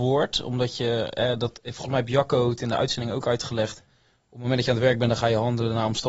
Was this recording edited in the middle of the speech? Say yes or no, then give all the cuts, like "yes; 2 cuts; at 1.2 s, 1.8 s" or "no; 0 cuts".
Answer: no; 0 cuts